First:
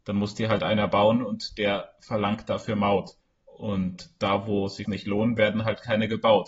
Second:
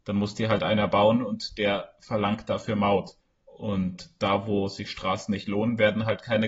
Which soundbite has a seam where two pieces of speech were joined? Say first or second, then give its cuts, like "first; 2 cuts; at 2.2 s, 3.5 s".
first; 1 cut; at 4.8 s